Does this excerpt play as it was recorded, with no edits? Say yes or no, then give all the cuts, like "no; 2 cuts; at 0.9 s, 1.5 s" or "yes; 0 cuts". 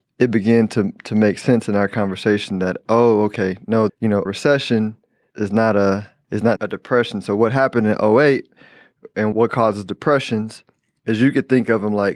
no; 6 cuts; at 3.9 s, 4.3 s, 5.3 s, 6.2 s, 6.6 s, 9.3 s